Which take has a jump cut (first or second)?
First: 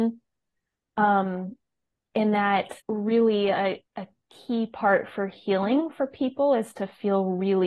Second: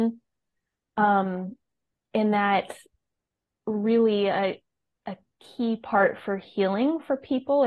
first